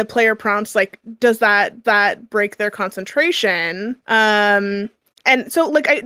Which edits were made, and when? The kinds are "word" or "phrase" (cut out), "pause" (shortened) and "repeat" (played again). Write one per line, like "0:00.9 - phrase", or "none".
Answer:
0:01.8 - repeat
0:04.0 - pause